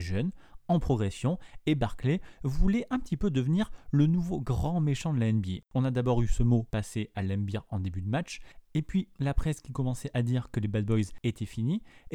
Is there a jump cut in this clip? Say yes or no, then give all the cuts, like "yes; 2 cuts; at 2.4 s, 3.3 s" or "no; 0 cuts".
yes; 1 cut; at 5.7 s